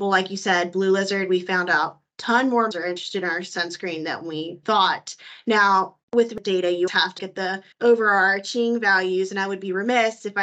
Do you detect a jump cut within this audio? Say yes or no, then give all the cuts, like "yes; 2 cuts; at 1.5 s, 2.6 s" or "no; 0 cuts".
yes; 6 cuts; at 2.7 s, 4.6 s, 6.0 s, 6.9 s, 7.2 s, 7.7 s